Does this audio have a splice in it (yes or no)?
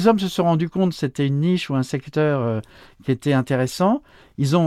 no